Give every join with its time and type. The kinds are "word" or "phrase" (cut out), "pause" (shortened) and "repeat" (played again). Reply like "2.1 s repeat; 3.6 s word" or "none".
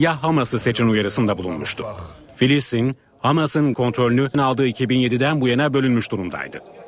3.7 s word; 4.3 s phrase